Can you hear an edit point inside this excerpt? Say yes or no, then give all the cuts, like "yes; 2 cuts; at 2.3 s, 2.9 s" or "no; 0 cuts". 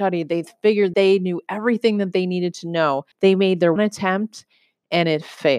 yes; 3 cuts; at 0.9 s, 3.1 s, 3.8 s